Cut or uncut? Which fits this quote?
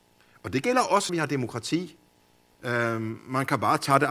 cut